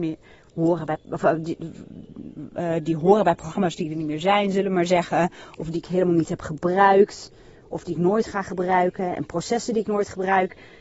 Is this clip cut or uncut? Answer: uncut